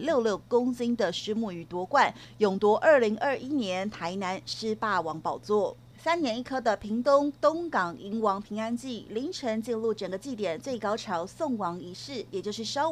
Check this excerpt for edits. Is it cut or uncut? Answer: uncut